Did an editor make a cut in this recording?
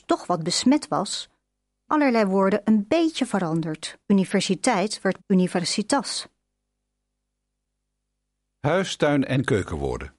yes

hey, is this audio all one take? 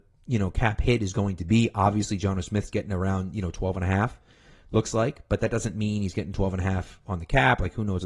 yes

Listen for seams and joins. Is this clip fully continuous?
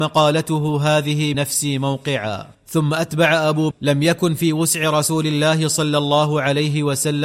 no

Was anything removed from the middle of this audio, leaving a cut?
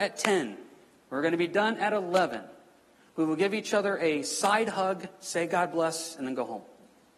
no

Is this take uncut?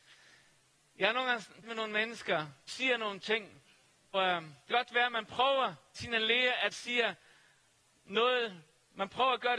no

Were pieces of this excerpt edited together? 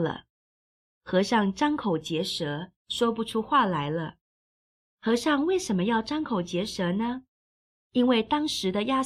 no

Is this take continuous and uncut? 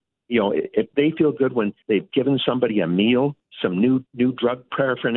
no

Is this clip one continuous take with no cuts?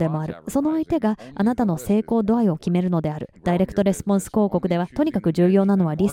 no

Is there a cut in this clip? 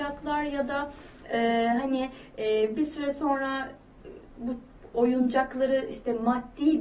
no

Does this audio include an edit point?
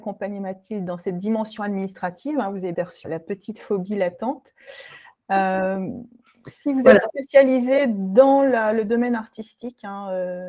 yes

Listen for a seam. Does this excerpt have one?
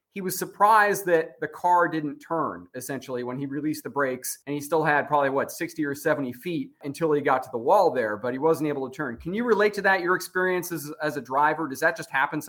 yes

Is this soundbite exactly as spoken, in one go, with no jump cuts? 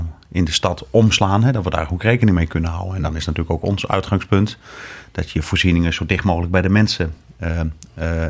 yes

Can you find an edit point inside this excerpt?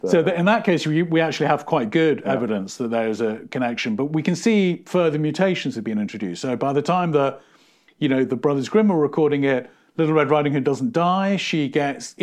no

